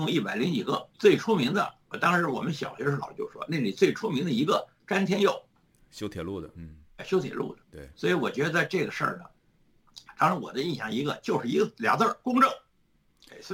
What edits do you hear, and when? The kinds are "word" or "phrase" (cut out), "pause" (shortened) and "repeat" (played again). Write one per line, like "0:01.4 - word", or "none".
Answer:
0:00.9 - pause
0:07.6 - pause